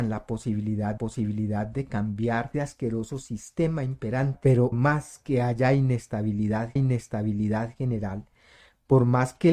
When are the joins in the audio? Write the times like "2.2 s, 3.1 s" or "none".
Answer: 1.0 s, 2.5 s, 4.7 s, 6.8 s